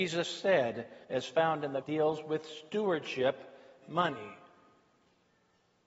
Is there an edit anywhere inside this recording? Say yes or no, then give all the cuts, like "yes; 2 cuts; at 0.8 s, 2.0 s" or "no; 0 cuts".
yes; 3 cuts; at 1.0 s, 1.8 s, 3.8 s